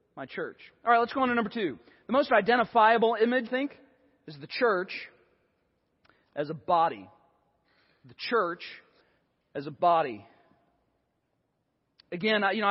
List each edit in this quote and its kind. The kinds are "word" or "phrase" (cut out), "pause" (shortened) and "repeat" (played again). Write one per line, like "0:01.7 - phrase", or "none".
0:03.5 - word
0:09.0 - pause